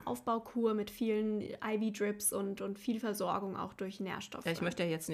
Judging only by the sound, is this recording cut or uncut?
cut